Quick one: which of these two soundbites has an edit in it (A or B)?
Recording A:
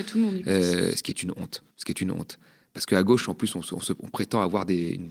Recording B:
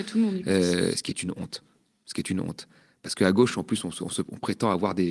A